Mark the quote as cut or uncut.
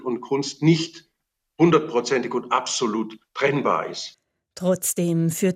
uncut